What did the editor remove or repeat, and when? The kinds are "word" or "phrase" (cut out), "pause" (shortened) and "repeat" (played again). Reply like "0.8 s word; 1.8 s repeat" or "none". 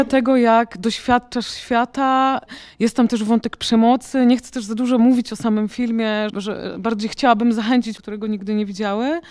6.3 s word; 8.0 s phrase